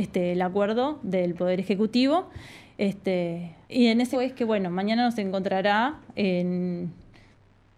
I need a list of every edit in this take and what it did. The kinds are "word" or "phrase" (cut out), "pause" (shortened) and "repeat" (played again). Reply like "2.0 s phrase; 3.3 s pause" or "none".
3.6 s pause; 4.1 s word